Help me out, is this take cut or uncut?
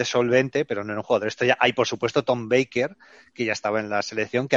uncut